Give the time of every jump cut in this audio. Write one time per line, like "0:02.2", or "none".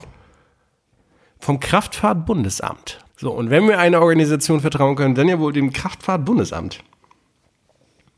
0:03.1